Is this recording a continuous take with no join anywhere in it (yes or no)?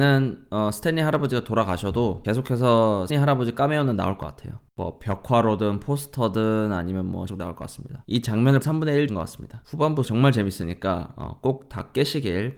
no